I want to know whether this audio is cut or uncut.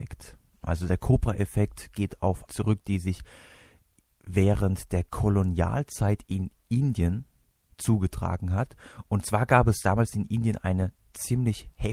cut